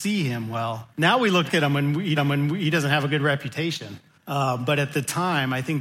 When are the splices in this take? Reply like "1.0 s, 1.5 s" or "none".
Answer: 0.9 s, 1.5 s, 2.2 s, 4.1 s